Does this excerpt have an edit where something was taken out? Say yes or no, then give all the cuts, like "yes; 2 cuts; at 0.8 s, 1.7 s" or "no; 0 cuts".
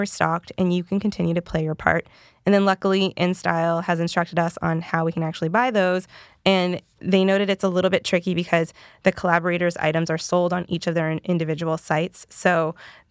no; 0 cuts